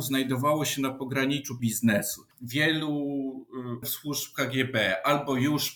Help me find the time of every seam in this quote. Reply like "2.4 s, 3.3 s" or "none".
1.6 s, 3.8 s